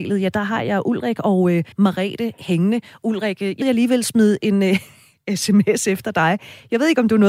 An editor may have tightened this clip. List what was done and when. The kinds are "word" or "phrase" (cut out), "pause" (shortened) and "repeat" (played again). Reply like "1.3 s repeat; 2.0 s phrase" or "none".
1.7 s pause; 3.6 s word